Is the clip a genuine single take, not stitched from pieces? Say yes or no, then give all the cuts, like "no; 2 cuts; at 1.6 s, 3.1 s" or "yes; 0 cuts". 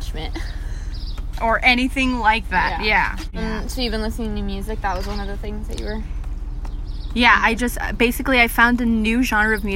yes; 0 cuts